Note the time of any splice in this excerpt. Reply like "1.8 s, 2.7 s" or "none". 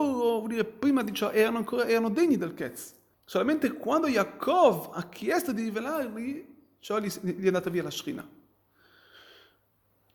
3.1 s